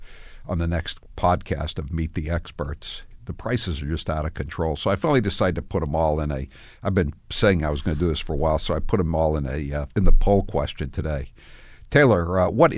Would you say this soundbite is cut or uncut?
cut